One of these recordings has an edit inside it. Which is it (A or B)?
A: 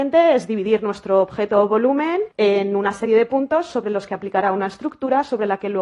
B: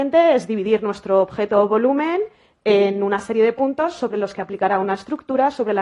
A